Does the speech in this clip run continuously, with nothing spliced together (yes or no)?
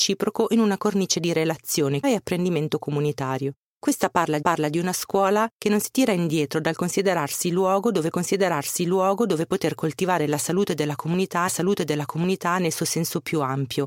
no